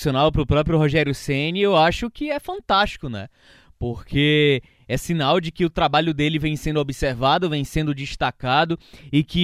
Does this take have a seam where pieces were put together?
no; 0 cuts

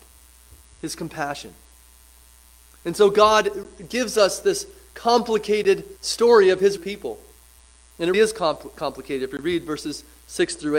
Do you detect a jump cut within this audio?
yes; 3 cuts; at 6.0 s, 6.8 s, 8.1 s

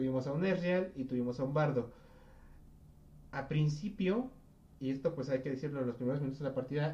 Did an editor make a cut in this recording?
no; 0 cuts

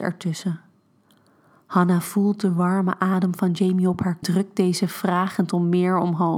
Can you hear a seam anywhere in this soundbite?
yes; 1 cut; at 4.2 s

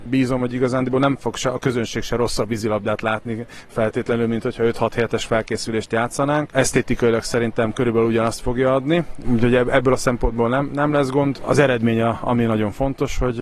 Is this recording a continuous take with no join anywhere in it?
no; 1 cut; at 9.2 s

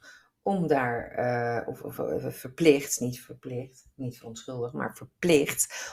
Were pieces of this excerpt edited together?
no; 0 cuts

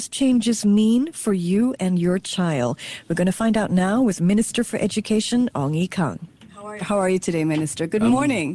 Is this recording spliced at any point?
no; 0 cuts

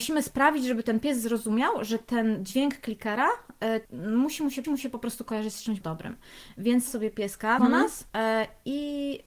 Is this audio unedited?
no; 6 cuts; at 3.9 s, 4.6 s, 5.8 s, 6.9 s, 7.6 s, 8.1 s

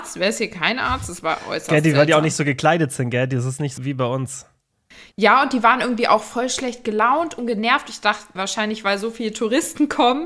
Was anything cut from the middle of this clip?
yes; 2 cuts; at 3.8 s, 8.3 s

